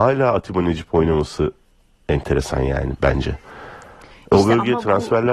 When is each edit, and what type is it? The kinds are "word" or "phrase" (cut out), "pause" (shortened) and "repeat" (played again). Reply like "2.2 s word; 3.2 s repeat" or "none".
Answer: none